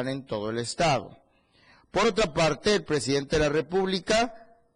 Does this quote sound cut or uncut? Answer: uncut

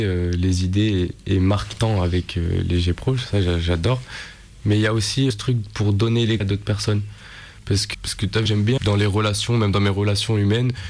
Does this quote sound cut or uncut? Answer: cut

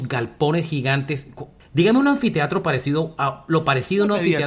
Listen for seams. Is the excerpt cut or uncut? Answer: cut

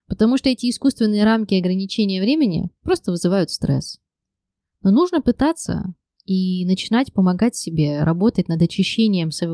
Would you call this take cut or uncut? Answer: uncut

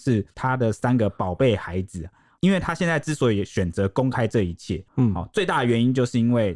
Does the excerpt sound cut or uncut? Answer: uncut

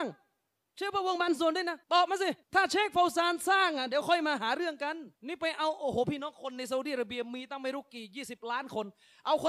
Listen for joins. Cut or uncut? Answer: cut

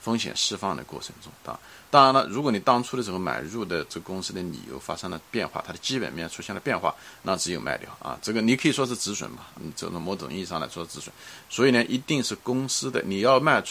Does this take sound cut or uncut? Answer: cut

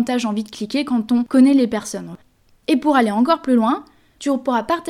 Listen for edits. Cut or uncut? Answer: uncut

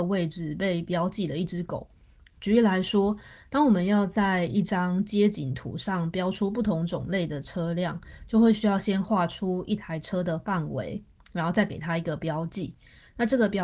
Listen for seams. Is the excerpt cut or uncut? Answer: uncut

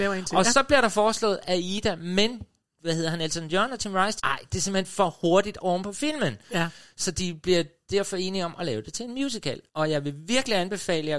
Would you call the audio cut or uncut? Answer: cut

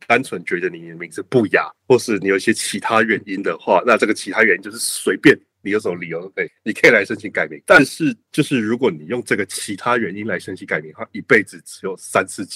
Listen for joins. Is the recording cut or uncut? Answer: cut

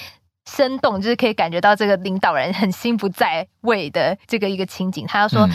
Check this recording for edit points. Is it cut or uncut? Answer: cut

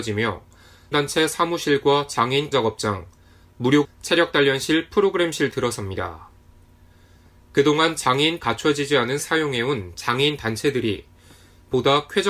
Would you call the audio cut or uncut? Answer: cut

